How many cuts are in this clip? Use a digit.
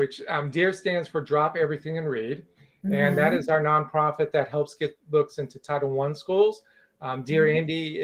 0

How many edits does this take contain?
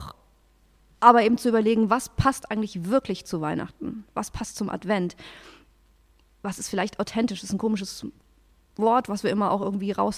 0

